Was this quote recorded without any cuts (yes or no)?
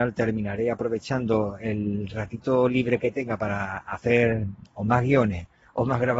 yes